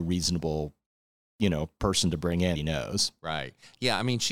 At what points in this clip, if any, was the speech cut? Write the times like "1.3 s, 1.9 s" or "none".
2.6 s